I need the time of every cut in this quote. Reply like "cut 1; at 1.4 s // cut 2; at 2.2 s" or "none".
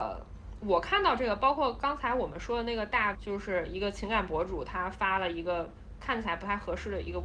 cut 1; at 3.1 s